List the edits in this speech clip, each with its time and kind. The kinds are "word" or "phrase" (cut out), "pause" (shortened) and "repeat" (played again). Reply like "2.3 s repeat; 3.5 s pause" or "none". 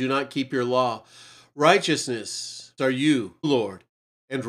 2.8 s word; 3.4 s word